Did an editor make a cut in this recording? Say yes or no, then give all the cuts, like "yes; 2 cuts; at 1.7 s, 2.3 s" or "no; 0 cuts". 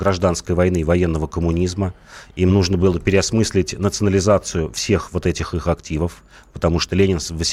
no; 0 cuts